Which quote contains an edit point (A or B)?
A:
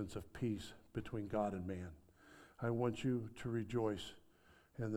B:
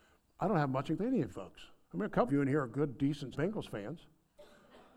B